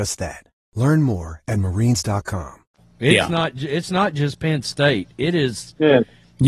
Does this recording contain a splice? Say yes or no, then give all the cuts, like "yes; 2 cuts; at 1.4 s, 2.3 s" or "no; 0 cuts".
no; 0 cuts